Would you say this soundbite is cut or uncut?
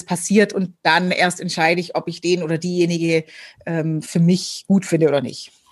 uncut